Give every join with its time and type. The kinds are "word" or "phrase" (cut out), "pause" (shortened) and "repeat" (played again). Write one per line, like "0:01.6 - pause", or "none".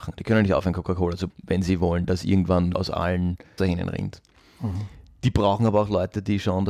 0:01.3 - word
0:02.7 - word
0:03.6 - word